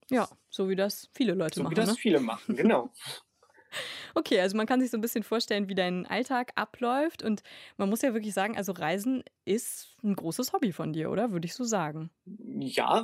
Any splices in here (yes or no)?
no